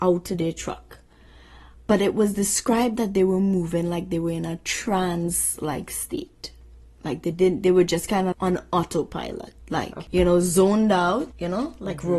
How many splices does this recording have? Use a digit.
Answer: 1